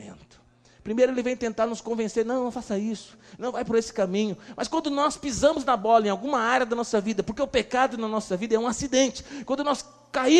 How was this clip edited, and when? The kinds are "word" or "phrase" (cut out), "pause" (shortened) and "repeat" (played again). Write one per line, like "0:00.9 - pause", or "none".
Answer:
none